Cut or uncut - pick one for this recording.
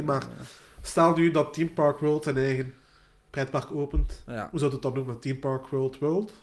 uncut